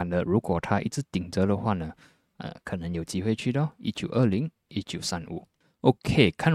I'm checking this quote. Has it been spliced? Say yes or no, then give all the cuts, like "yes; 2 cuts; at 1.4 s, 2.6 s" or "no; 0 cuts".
no; 0 cuts